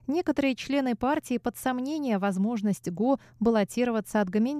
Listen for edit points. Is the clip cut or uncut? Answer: cut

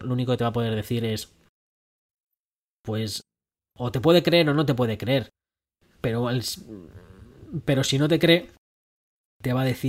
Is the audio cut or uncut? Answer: uncut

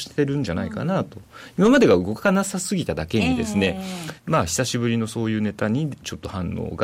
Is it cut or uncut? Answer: cut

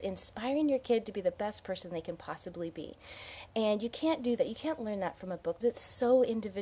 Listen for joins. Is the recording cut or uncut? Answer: cut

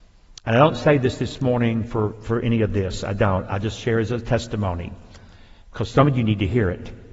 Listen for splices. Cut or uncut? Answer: cut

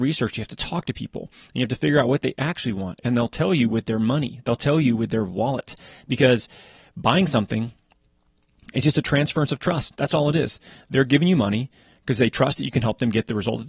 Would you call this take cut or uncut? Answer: uncut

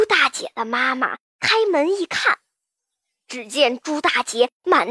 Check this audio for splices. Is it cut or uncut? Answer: uncut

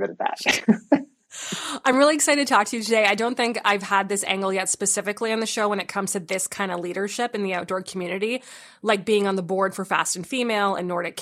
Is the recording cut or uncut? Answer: uncut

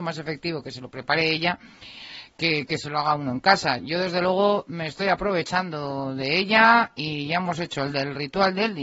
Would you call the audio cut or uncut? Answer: uncut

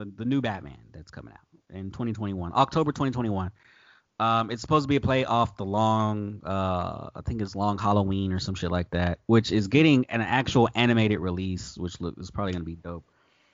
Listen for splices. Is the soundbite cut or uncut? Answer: uncut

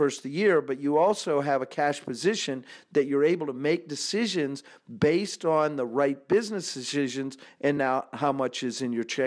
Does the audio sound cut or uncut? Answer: uncut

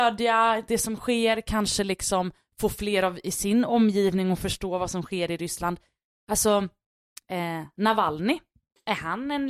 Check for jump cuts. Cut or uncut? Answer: uncut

